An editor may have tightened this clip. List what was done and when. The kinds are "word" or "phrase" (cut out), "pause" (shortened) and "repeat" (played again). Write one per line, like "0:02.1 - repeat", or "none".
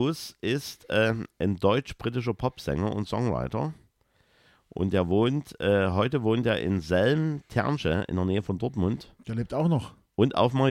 none